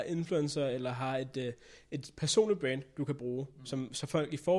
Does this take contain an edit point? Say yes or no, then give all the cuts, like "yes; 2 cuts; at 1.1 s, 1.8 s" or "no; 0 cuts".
no; 0 cuts